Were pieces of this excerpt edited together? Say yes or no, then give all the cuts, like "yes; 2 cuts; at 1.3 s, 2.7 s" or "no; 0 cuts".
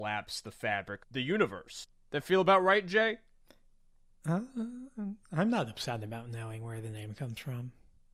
yes; 1 cut; at 1.0 s